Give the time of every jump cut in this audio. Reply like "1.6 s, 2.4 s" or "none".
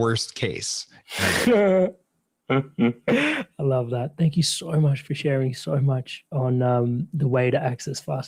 none